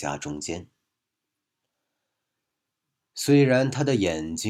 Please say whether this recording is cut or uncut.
uncut